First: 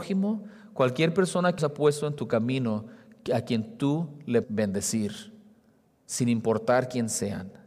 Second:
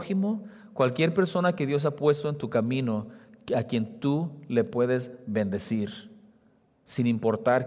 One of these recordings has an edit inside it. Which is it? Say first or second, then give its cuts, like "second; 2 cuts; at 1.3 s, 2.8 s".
first; 2 cuts; at 1.6 s, 4.4 s